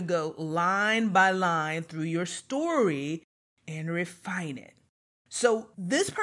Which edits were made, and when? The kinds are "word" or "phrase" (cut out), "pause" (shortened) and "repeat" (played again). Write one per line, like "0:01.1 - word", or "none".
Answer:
none